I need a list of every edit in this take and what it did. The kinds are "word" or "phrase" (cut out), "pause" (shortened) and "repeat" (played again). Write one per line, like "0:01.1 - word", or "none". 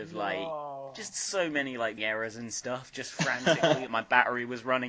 0:02.0 - word
0:03.9 - word

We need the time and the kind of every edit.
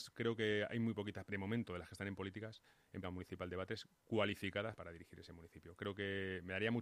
0:01.3 - word
0:03.0 - word
0:04.8 - word

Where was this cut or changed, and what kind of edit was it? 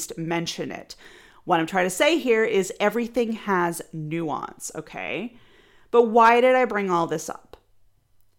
none

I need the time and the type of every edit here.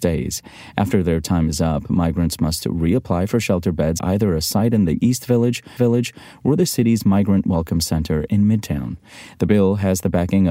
0:04.0 - word
0:05.8 - repeat

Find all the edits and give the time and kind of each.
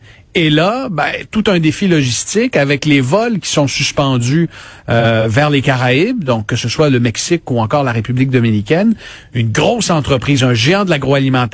none

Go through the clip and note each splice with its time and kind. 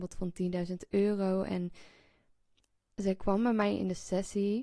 none

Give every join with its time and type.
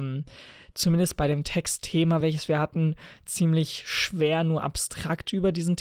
none

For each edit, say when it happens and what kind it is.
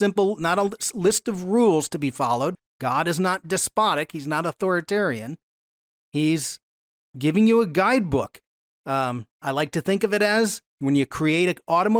none

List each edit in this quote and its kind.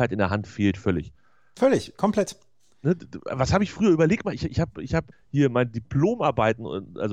0:05.1 - word

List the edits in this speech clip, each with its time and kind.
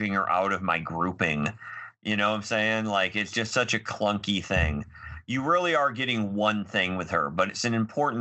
none

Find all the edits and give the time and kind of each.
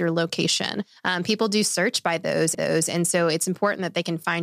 0:02.5 - repeat

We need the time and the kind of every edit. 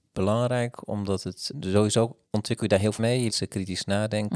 0:01.5 - word
0:02.2 - pause
0:03.0 - word
0:03.3 - word

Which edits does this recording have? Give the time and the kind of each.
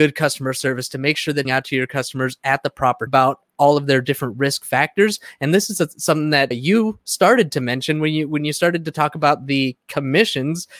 0:01.4 - phrase
0:03.1 - phrase
0:06.5 - word

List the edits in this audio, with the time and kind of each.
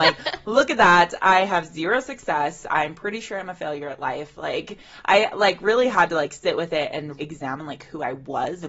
0:07.2 - word

